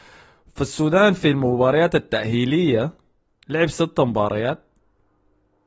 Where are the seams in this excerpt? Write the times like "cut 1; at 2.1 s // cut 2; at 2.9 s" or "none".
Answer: none